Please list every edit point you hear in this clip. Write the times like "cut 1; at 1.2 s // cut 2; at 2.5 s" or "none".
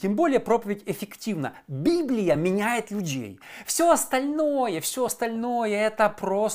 none